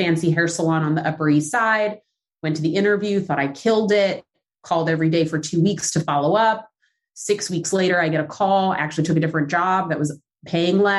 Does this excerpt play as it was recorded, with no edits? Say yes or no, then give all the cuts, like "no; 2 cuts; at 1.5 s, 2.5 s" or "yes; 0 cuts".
yes; 0 cuts